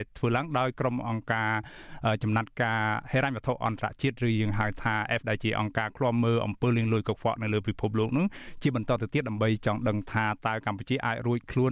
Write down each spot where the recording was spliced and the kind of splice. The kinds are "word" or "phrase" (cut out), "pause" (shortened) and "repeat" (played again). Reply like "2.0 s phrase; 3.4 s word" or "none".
5.2 s word